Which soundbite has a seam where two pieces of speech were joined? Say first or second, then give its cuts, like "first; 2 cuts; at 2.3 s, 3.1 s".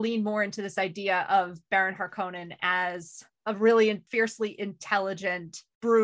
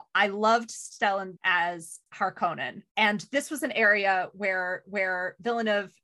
second; 3 cuts; at 1.4 s, 2.9 s, 4.8 s